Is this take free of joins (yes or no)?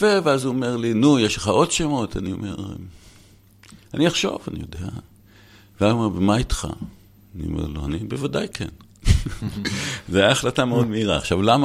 yes